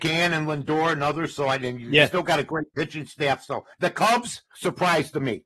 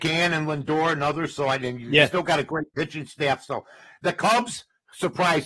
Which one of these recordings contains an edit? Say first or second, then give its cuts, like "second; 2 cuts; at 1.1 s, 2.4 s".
first; 2 cuts; at 3.7 s, 4.5 s